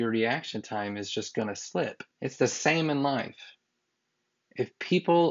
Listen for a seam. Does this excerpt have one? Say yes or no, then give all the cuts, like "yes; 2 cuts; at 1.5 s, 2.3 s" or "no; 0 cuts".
yes; 1 cut; at 2.1 s